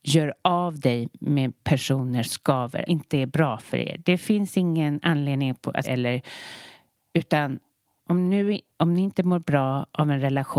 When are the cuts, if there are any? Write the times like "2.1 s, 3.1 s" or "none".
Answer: 2.2 s, 2.9 s, 5.8 s